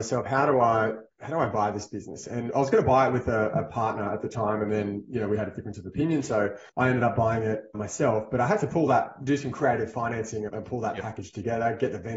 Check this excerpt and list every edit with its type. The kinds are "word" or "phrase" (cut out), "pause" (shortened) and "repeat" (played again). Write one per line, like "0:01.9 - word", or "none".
0:06.7 - pause
0:07.7 - word
0:10.5 - word